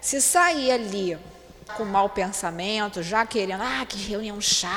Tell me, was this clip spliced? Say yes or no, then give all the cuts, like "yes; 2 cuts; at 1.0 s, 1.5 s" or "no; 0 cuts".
yes; 1 cut; at 1.7 s